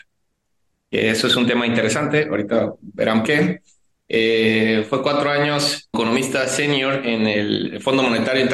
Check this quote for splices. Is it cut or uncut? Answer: cut